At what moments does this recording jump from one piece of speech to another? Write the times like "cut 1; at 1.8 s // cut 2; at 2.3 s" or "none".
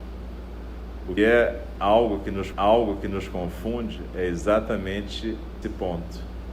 cut 1; at 1.2 s // cut 2; at 2.5 s // cut 3; at 5.6 s